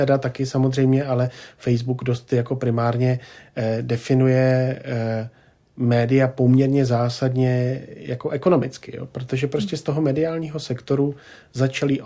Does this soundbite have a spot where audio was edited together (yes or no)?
no